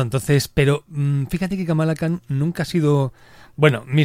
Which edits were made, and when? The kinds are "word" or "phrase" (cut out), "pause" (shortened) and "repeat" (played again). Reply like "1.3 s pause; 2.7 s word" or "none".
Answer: none